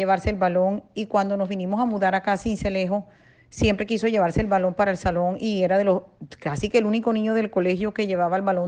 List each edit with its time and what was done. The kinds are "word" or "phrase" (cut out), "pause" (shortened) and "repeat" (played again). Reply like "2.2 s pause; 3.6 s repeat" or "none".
none